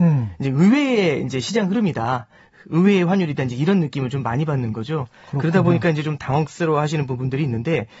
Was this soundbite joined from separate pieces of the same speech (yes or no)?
no